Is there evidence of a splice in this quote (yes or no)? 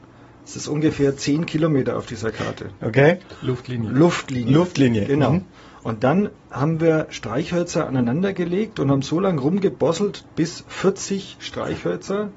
no